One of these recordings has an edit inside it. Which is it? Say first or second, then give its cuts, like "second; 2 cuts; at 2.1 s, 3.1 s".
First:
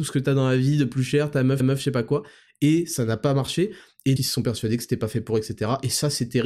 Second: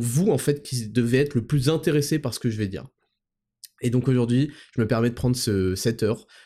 first; 2 cuts; at 1.6 s, 4.2 s